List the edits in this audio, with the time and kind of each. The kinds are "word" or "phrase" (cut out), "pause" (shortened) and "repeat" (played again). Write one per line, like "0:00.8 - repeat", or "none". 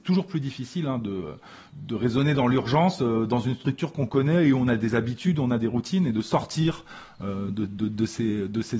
none